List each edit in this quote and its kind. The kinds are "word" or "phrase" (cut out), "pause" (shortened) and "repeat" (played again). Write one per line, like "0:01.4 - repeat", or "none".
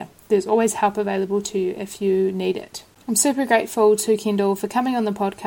0:02.9 - pause